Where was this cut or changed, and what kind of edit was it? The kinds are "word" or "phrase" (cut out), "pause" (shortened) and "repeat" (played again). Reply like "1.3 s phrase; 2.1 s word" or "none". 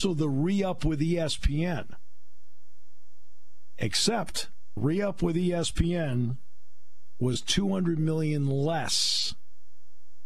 4.8 s word